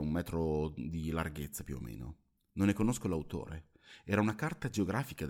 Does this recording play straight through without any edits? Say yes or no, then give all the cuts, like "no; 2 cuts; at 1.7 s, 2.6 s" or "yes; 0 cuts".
yes; 0 cuts